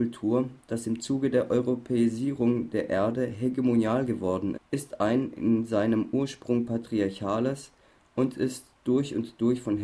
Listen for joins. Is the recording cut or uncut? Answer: cut